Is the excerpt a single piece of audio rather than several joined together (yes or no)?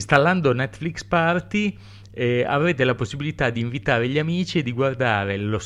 yes